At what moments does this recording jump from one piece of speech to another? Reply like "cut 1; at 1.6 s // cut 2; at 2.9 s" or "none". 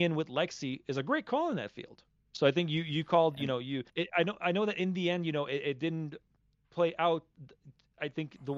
cut 1; at 3.9 s